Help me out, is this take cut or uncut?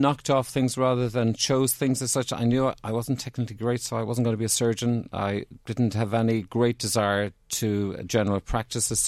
cut